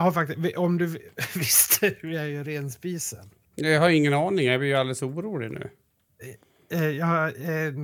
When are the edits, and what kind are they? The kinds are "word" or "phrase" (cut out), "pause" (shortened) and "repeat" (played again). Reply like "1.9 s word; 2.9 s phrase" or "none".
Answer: 3.5 s pause